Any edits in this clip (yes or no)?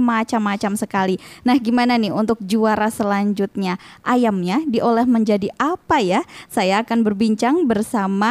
no